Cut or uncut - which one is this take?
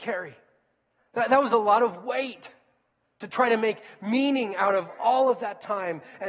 uncut